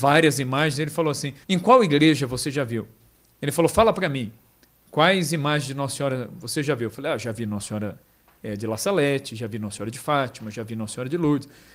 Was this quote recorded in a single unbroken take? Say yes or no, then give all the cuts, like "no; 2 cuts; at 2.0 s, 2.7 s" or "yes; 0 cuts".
no; 1 cut; at 1.4 s